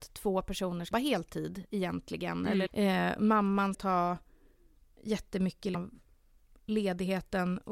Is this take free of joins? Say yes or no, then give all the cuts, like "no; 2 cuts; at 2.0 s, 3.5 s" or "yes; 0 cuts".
no; 4 cuts; at 0.9 s, 2.7 s, 3.7 s, 5.7 s